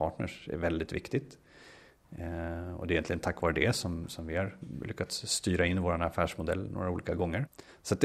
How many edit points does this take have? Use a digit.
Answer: 0